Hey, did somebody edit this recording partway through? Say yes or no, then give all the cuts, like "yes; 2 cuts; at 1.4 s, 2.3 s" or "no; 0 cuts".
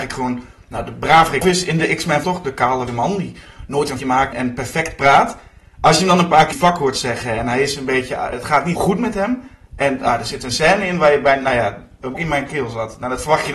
yes; 9 cuts; at 1.4 s, 2.2 s, 2.9 s, 4.0 s, 4.3 s, 6.5 s, 8.3 s, 8.8 s, 12.1 s